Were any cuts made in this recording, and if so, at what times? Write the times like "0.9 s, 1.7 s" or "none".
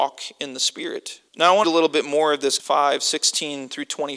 1.3 s, 1.6 s, 2.6 s